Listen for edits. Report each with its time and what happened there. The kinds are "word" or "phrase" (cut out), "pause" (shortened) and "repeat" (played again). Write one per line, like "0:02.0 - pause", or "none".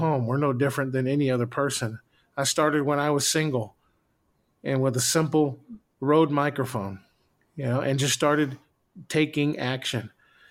none